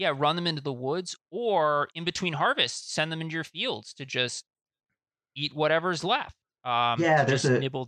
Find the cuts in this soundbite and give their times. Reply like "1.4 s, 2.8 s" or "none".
none